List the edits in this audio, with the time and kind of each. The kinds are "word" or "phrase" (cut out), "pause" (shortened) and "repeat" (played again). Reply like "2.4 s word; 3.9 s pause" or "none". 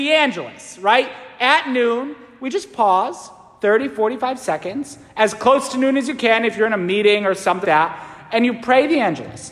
7.6 s word